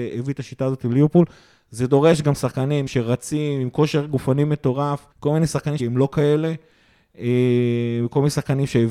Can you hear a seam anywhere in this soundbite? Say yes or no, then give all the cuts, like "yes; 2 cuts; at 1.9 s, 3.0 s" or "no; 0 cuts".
yes; 3 cuts; at 2.9 s, 5.1 s, 5.8 s